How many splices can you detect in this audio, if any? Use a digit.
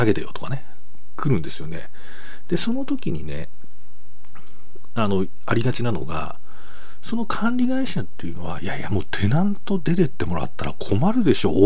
0